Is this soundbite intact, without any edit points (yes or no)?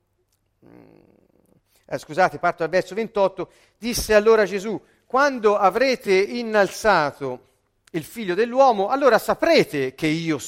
yes